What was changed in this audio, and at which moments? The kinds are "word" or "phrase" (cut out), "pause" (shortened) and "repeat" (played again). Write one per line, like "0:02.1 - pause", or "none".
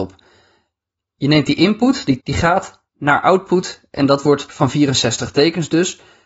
0:02.2 - word
0:02.9 - pause
0:04.5 - phrase